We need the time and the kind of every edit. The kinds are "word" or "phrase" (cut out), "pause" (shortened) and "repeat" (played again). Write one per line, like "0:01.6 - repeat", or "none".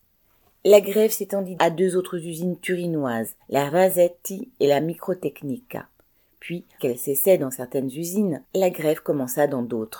0:01.6 - word
0:03.4 - pause
0:06.8 - phrase
0:08.4 - pause

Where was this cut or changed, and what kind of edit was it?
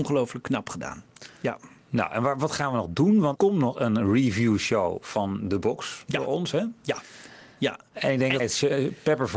0:03.4 - word
0:08.4 - phrase

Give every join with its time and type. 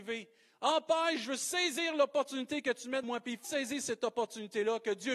0:03.0 - word
0:03.4 - word

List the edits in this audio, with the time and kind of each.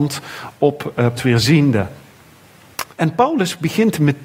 0:01.2 - phrase
0:02.9 - pause

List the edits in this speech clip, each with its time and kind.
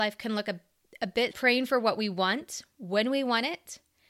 0:01.3 - phrase

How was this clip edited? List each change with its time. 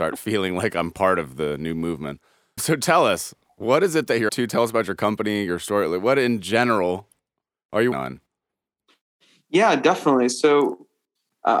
0:02.6 - word
0:04.3 - word
0:07.9 - word

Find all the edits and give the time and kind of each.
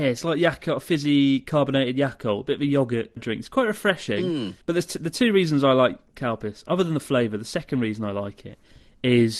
0:03.2 - word
0:04.6 - pause

